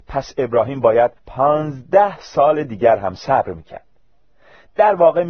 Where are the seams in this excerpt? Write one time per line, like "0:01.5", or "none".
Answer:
0:01.2